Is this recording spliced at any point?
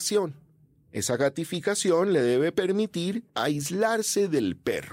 yes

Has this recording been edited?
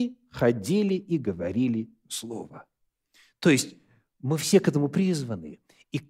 no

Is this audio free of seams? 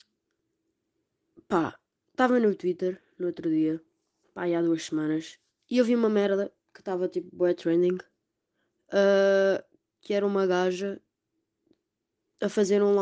no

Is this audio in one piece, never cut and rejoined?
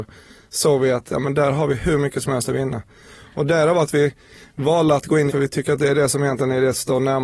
no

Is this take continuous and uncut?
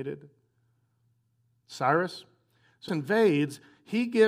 no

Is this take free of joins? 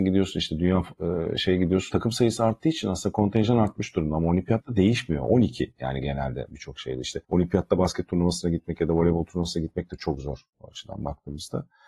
no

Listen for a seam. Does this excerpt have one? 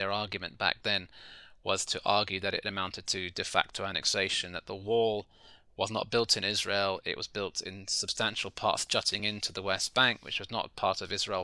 no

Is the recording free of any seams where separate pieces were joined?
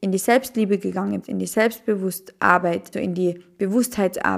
no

